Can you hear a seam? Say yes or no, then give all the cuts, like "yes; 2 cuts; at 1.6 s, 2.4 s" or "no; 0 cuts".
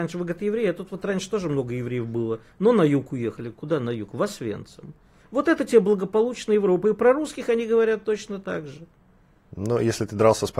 no; 0 cuts